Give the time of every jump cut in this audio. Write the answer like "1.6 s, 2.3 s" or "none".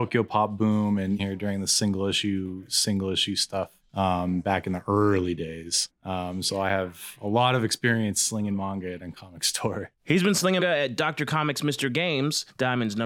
1.2 s, 10.6 s